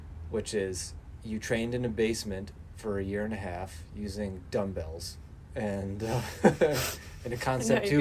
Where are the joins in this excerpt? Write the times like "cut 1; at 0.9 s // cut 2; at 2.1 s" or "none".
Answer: none